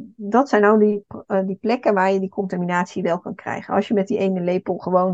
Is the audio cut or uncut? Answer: uncut